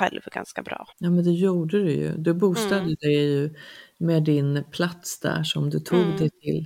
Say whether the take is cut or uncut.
cut